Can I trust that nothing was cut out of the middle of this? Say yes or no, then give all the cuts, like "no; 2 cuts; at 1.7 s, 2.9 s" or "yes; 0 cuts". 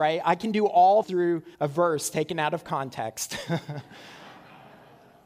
no; 2 cuts; at 1.0 s, 1.5 s